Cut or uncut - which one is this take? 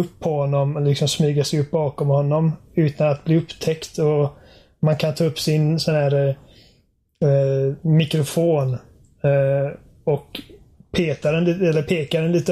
uncut